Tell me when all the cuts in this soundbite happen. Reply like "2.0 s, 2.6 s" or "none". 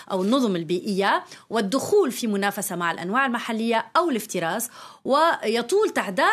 none